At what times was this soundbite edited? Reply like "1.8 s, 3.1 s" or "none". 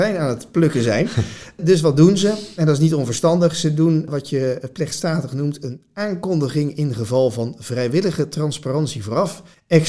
none

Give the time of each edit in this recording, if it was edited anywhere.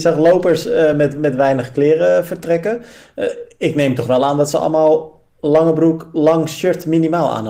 none

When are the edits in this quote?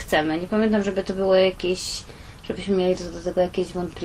none

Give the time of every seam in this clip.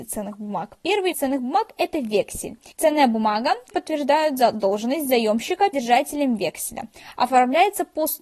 1.1 s, 2.7 s, 3.7 s, 5.7 s

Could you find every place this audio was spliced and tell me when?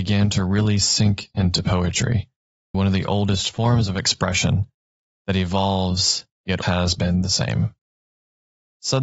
2.7 s, 6.6 s

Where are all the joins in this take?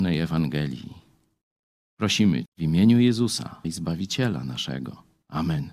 2.5 s, 3.6 s

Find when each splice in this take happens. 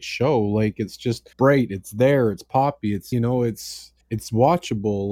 1.3 s, 3.1 s, 4.0 s

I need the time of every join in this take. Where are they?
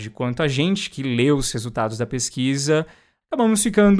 none

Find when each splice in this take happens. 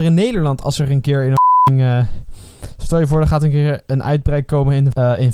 none

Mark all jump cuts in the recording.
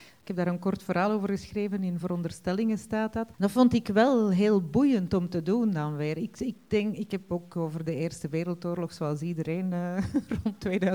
3.3 s

